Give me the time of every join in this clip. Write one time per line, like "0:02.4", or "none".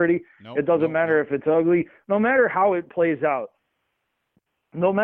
none